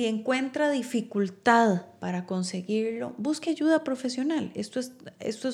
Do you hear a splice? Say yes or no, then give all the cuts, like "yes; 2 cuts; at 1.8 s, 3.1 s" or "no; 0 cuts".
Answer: no; 0 cuts